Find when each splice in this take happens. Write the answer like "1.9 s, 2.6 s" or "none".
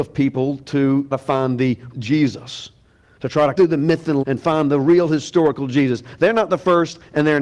1.1 s, 1.9 s, 3.5 s, 4.2 s